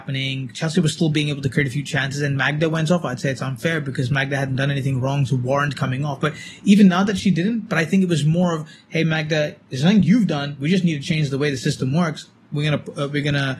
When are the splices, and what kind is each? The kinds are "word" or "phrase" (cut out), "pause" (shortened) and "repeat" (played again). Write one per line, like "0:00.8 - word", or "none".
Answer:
none